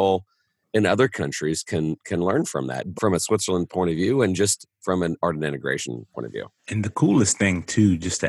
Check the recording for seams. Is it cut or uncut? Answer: cut